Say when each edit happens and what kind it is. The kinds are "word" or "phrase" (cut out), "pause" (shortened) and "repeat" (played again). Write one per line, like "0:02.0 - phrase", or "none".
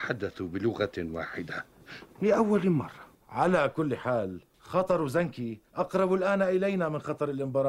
none